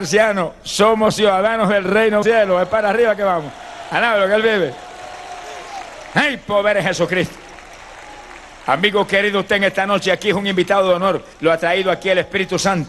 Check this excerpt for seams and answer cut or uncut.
cut